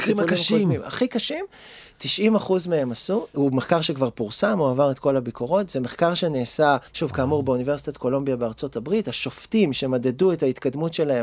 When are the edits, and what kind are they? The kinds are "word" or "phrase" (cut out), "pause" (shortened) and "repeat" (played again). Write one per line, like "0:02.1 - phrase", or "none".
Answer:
0:06.9 - pause